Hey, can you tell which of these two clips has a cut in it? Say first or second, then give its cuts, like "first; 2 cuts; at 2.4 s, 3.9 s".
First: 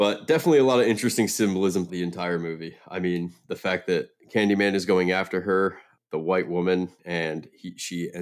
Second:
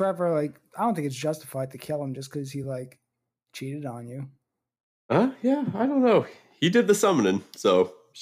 first; 3 cuts; at 1.9 s, 3.4 s, 5.9 s